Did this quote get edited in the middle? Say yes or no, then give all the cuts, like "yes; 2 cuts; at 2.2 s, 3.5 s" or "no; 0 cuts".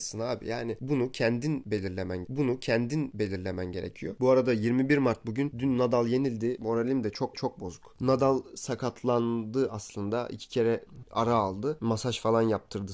yes; 3 cuts; at 2.2 s, 7.3 s, 11.0 s